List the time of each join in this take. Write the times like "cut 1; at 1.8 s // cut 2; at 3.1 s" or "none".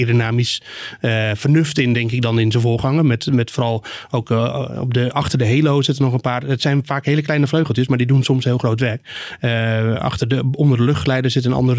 none